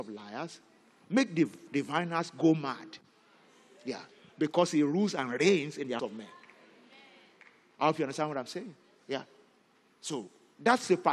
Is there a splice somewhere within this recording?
yes; 1 cut; at 6.0 s

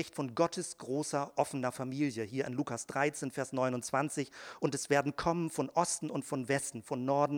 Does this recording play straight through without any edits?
yes; 0 cuts

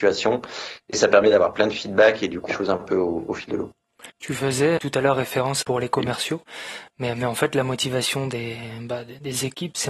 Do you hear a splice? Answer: yes; 4 cuts; at 2.5 s, 4.1 s, 4.8 s, 5.6 s

